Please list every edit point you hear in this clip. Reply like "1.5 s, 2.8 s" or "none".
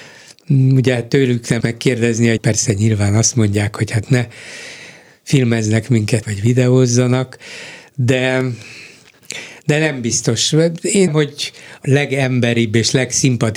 1.6 s, 2.4 s, 4.1 s, 6.2 s, 11.1 s, 11.8 s

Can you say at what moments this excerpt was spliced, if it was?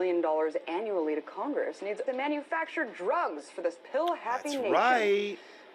2.1 s

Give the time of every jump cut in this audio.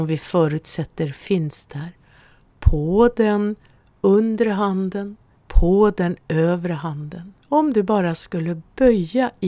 5.4 s, 7.4 s

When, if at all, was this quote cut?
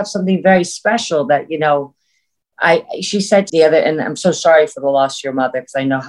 3.5 s

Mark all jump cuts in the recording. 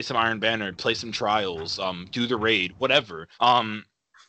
3.3 s

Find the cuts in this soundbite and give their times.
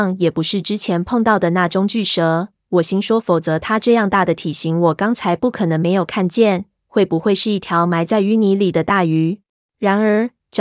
9.6 s

